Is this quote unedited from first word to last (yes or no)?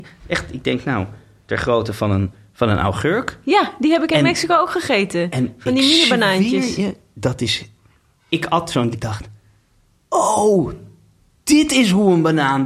no